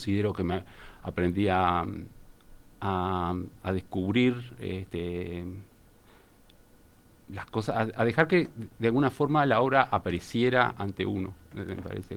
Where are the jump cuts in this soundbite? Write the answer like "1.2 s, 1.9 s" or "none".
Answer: none